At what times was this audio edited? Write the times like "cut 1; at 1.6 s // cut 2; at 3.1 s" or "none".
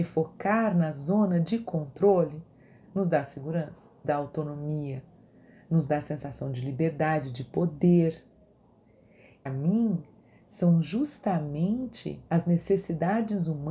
cut 1; at 4.0 s // cut 2; at 9.5 s // cut 3; at 12.3 s

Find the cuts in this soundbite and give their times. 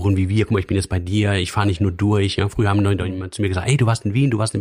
none

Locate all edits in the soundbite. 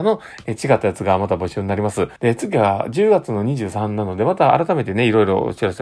cut 1; at 2.2 s

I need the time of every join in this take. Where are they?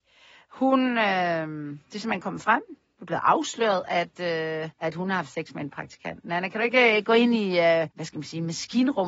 cut 1; at 4.7 s // cut 2; at 7.9 s

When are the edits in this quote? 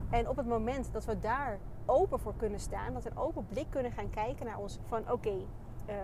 cut 1; at 1.9 s // cut 2; at 3.0 s // cut 3; at 4.8 s

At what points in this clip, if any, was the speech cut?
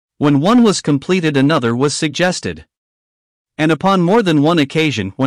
none

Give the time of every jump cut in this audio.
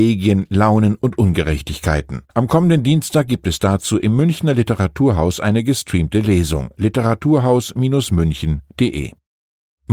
cut 1; at 2.3 s

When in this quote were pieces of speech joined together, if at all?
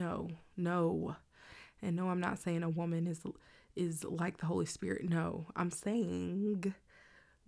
none

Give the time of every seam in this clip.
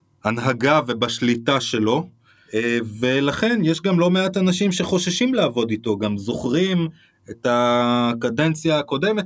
none

